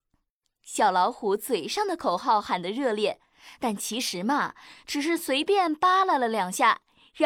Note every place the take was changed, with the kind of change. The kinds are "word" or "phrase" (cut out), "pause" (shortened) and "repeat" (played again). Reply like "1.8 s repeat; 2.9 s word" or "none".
none